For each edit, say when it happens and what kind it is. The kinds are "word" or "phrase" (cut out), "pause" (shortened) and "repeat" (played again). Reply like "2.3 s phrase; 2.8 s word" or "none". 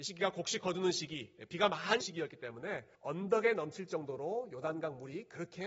2.0 s word; 2.9 s pause